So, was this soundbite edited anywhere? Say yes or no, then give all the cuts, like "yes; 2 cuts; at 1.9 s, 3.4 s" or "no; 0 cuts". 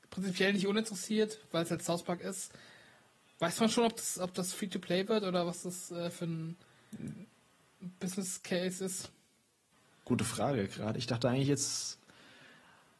no; 0 cuts